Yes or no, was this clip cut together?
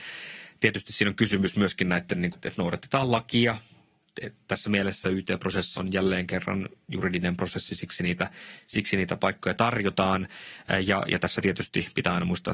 yes